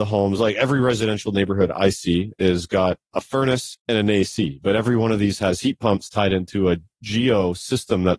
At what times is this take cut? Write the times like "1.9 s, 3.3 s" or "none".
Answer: 3.1 s, 3.8 s